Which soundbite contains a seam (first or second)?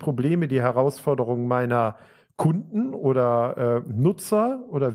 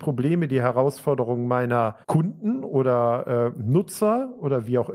second